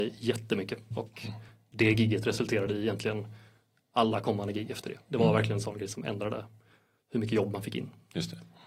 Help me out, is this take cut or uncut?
uncut